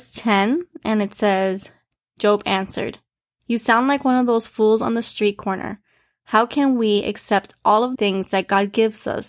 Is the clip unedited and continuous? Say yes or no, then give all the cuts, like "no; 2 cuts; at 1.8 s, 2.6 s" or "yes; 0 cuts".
no; 1 cut; at 8.0 s